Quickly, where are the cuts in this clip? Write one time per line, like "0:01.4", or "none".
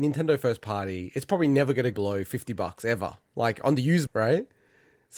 0:01.9
0:03.3
0:04.1